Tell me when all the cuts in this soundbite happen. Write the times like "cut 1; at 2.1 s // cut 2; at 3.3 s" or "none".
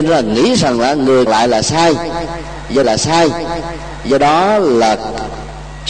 cut 1; at 1.3 s // cut 2; at 2.8 s

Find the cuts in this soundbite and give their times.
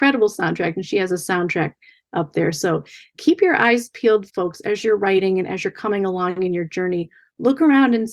none

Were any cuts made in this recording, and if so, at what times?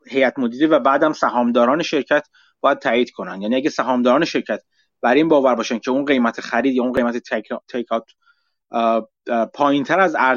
none

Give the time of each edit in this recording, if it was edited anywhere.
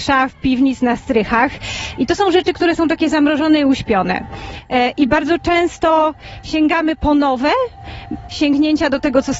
cut 1; at 8.3 s

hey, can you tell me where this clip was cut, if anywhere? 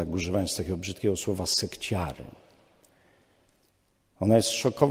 none

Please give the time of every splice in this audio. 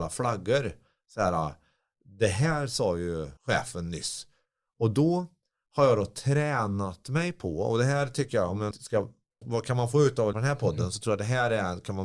cut 1; at 3.4 s // cut 2; at 8.7 s // cut 3; at 9.4 s // cut 4; at 10.3 s

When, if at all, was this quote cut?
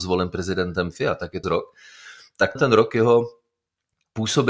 cut 1; at 1.4 s // cut 2; at 2.6 s

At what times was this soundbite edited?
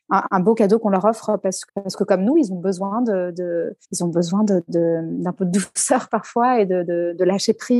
cut 1; at 1.7 s // cut 2; at 3.8 s

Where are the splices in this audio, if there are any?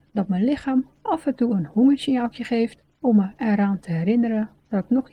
none

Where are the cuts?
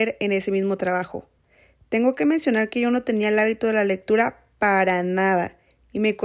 none

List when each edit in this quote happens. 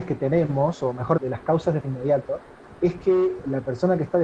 cut 1; at 1.2 s // cut 2; at 1.8 s // cut 3; at 2.8 s

